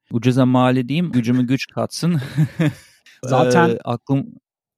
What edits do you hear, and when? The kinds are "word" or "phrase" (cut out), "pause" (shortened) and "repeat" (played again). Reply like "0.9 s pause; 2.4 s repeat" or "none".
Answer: 1.1 s word; 3.2 s word